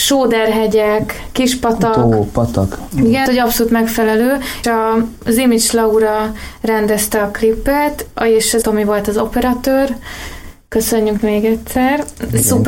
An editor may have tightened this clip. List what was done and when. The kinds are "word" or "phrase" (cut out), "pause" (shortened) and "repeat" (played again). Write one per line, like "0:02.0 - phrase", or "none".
0:03.3 - word
0:04.6 - word
0:08.6 - word
0:11.2 - word